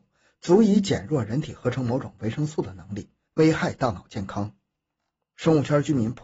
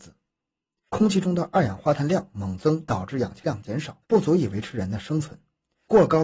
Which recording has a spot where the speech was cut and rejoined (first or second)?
second